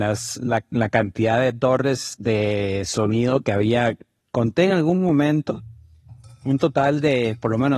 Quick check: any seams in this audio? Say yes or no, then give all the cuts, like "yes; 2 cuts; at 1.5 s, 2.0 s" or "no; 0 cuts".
no; 0 cuts